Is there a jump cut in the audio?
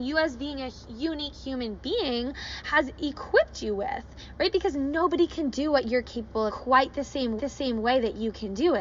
yes; 2 cuts; at 6.5 s, 7.4 s

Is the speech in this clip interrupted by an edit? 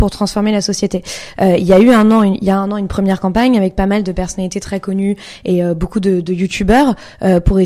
no; 0 cuts

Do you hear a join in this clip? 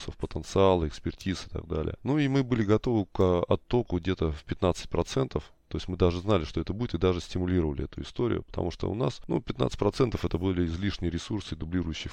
no; 0 cuts

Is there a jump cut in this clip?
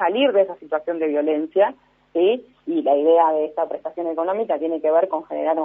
no; 0 cuts

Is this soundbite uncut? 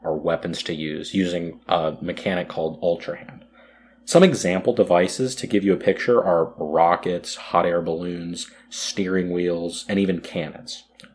yes; 0 cuts

